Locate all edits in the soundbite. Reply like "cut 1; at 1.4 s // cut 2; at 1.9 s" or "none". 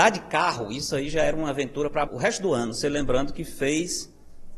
cut 1; at 2.1 s